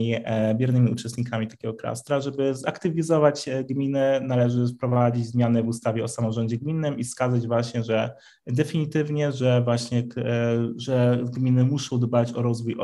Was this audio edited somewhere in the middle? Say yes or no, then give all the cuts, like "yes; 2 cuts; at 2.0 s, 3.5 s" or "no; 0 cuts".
no; 0 cuts